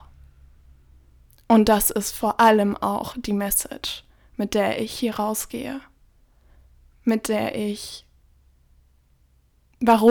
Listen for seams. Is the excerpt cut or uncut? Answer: uncut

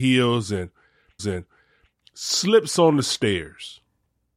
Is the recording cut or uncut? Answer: cut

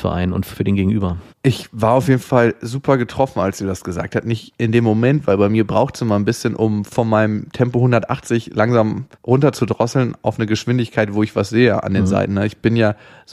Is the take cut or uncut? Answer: cut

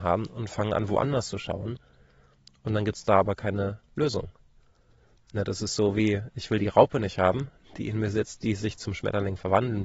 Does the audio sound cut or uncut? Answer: uncut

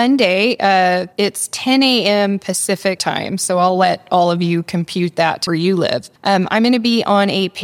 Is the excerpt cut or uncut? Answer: cut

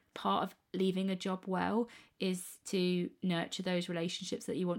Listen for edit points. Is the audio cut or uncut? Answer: uncut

